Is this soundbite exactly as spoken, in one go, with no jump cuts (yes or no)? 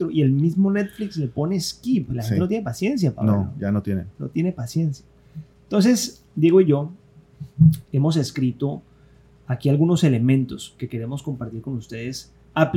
yes